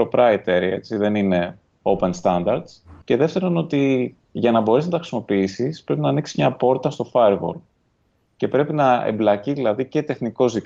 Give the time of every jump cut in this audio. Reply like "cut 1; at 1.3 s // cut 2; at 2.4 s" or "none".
cut 1; at 3.0 s